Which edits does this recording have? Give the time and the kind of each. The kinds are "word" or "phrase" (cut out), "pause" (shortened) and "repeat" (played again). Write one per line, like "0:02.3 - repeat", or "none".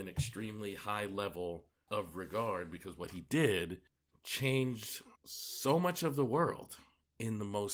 0:05.2 - pause